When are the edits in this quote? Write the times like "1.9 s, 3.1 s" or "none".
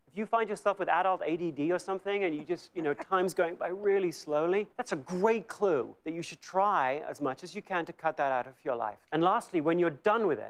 4.7 s, 6.0 s, 9.0 s